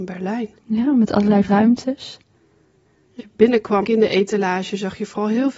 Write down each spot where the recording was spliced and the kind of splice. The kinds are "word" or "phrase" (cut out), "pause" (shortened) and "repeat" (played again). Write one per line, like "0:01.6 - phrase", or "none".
0:01.4 - word
0:03.2 - word
0:03.8 - word